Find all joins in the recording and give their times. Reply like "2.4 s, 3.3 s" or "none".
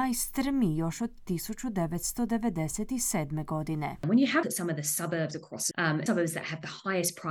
4.4 s, 5.7 s, 6.1 s

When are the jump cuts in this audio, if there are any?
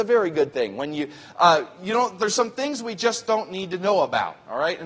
none

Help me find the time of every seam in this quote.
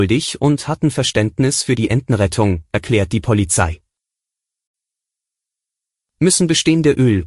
none

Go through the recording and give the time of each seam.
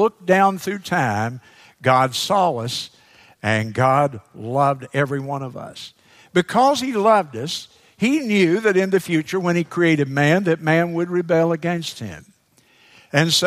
none

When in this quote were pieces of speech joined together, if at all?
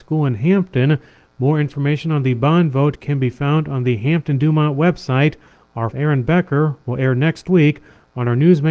5.9 s

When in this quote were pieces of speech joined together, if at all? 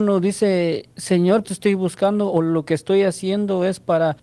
1.4 s

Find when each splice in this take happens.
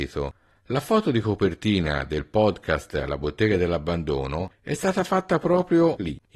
none

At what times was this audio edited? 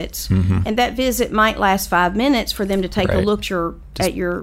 3.4 s

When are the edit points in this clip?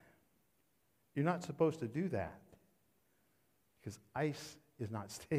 none

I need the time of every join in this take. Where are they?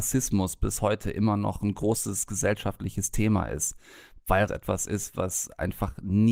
4.5 s

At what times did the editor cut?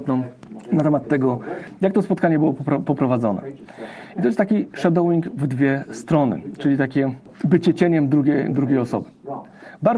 none

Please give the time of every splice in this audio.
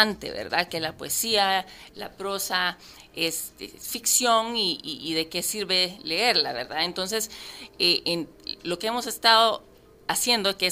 none

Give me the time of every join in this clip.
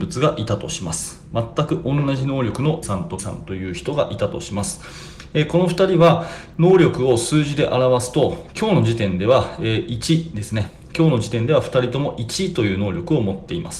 2.8 s, 3.2 s

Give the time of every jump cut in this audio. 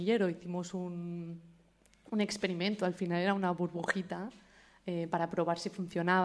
none

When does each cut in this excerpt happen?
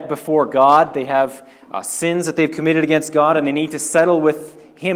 none

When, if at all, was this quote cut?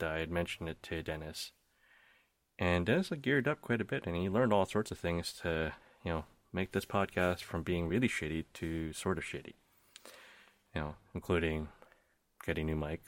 none

